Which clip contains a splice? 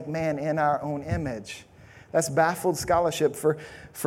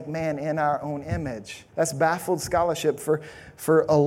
second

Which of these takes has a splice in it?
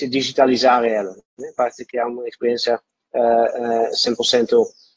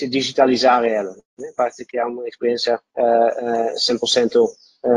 second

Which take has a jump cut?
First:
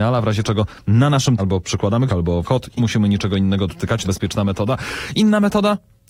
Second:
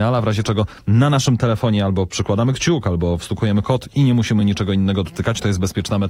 first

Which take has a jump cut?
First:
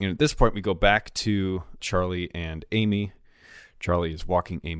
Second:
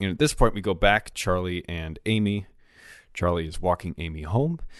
second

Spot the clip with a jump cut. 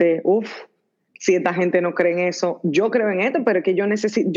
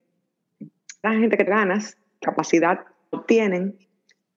second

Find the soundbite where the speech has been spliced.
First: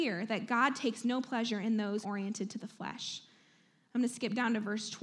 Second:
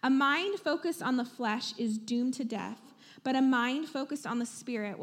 first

